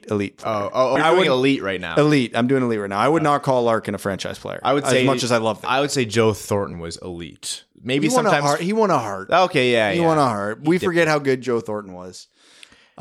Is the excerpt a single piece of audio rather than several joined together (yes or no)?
no